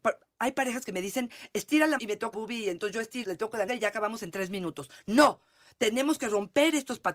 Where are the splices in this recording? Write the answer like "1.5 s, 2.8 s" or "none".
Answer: 2.0 s, 2.3 s, 3.2 s, 3.7 s